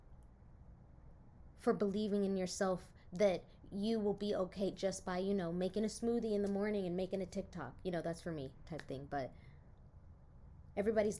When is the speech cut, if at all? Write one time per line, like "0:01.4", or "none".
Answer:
none